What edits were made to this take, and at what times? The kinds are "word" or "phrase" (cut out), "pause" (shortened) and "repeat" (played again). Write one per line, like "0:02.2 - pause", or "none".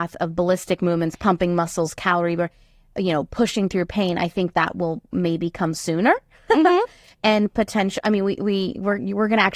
0:04.5 - word

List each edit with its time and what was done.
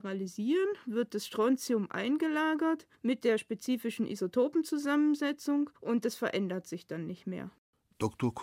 0:02.9 - pause
0:05.8 - pause

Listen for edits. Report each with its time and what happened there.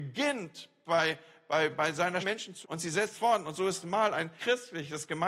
0:01.7 - word
0:02.2 - word
0:02.6 - word
0:03.1 - word
0:03.8 - word
0:04.4 - word

